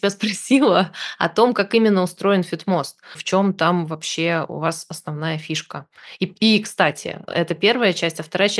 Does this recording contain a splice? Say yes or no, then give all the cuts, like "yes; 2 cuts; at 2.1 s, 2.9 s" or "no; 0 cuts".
no; 0 cuts